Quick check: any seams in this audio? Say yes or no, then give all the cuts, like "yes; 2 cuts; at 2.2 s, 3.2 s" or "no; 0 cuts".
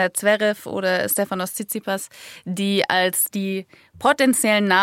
no; 0 cuts